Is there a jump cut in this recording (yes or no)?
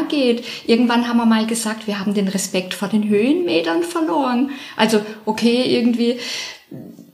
no